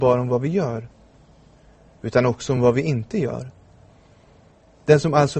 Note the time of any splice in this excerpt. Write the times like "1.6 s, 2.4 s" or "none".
none

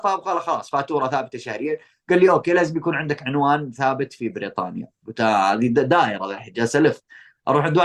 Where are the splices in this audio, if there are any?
none

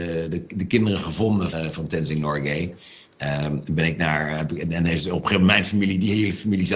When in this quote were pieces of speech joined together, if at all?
1.5 s

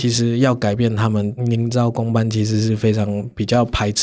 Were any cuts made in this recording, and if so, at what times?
1.4 s

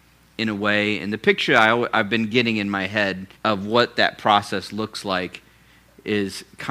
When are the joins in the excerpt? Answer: 3.4 s

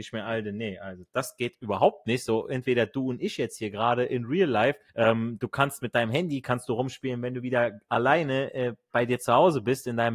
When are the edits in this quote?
4.9 s

